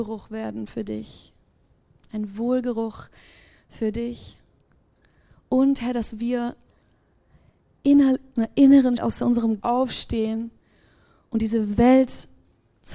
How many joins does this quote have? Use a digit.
3